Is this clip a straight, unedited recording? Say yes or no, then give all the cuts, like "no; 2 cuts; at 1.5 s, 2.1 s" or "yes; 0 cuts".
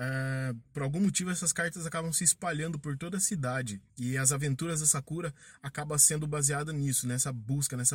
no; 1 cut; at 3.9 s